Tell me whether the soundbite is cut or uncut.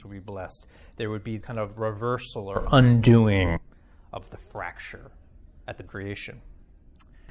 cut